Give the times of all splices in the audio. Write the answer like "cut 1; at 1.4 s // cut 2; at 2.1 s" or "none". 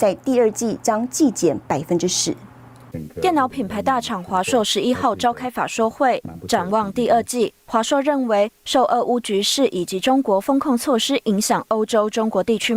none